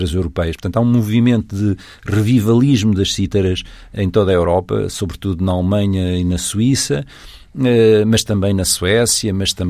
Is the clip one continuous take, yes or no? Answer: yes